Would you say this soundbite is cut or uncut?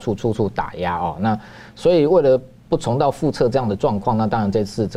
uncut